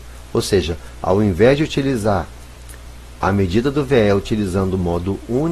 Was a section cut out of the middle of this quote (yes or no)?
no